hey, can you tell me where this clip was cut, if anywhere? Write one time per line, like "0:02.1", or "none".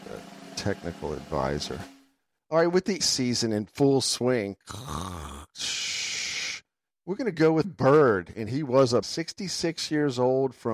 0:03.0
0:07.6
0:09.0